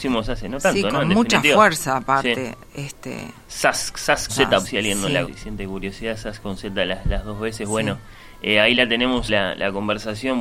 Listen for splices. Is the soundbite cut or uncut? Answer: cut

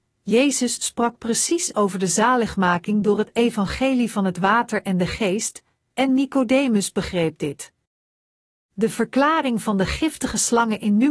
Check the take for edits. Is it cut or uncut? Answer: uncut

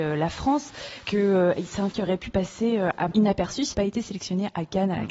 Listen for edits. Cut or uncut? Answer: cut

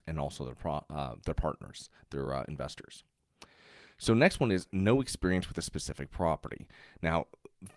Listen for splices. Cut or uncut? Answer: uncut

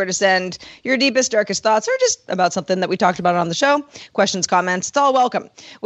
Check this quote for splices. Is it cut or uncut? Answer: uncut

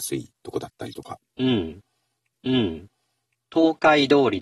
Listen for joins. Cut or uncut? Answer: cut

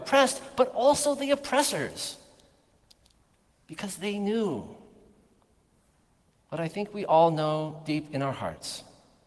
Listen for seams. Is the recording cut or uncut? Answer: uncut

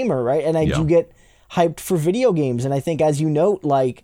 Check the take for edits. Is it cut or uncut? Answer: uncut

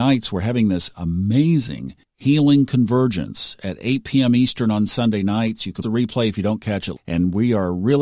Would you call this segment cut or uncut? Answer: cut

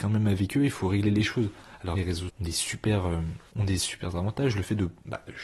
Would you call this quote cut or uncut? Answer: cut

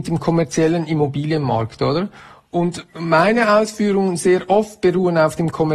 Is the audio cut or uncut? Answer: uncut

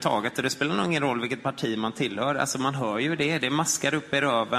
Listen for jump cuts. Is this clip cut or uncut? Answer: uncut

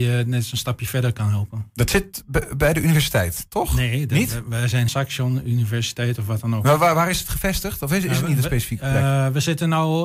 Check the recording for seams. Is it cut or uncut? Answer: cut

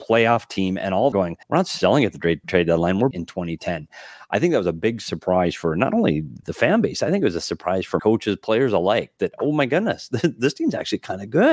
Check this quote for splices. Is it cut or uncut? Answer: cut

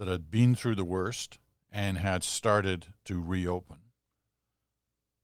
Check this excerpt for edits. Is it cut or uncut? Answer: uncut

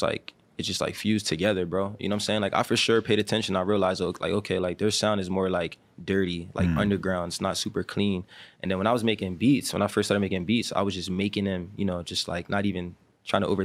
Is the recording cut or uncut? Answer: uncut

